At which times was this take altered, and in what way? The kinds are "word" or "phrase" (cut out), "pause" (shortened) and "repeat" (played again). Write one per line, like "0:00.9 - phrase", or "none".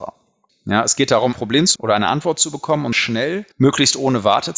0:01.3 - word
0:01.8 - word
0:02.9 - word
0:03.5 - pause